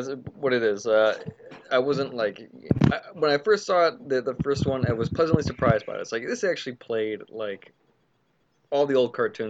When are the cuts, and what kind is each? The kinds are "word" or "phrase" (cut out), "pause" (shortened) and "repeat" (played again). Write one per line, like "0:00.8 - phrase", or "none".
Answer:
none